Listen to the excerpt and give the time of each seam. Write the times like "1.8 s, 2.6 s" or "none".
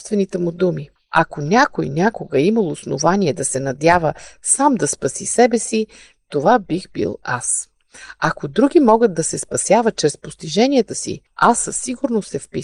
1.0 s, 11.3 s